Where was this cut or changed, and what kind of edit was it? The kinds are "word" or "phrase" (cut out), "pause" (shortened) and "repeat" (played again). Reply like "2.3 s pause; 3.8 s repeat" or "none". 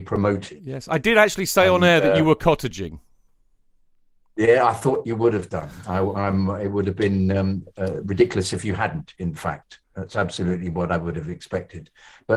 9.8 s pause